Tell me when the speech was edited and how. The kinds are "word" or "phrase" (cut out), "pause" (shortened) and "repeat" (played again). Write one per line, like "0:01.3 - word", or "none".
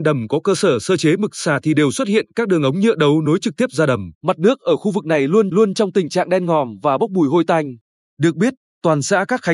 0:04.1 - pause
0:05.5 - repeat